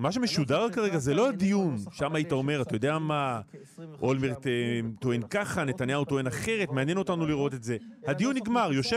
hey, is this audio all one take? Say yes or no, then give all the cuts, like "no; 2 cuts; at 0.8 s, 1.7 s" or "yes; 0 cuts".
yes; 0 cuts